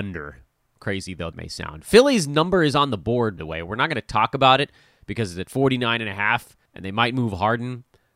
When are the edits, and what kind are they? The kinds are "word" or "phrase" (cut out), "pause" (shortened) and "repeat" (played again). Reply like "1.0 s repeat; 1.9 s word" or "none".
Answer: 1.3 s word; 3.4 s word; 6.7 s pause